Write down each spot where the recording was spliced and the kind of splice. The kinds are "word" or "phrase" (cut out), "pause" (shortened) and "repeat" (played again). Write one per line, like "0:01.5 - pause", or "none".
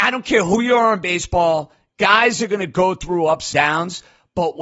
0:03.5 - word